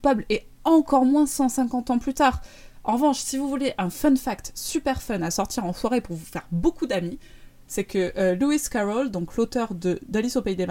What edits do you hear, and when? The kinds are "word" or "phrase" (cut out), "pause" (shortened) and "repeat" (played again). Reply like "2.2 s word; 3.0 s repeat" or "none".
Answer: none